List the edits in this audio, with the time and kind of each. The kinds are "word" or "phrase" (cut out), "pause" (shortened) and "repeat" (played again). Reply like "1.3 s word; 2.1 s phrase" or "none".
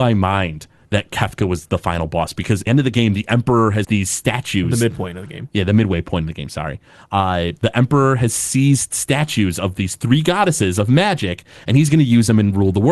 2.7 s phrase; 3.8 s word